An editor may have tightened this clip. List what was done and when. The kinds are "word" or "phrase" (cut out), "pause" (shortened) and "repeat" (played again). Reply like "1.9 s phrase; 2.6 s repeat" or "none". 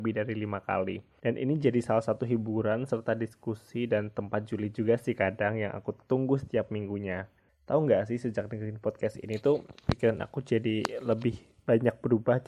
none